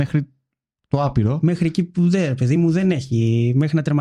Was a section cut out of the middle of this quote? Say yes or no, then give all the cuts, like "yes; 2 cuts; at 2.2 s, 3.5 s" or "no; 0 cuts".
no; 0 cuts